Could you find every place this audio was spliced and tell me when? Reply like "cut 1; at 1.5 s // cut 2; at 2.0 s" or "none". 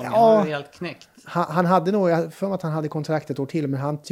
none